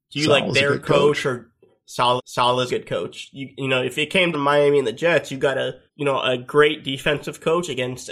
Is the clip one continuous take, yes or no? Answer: no